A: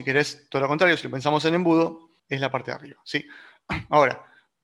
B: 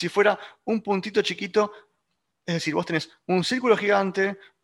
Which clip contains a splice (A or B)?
A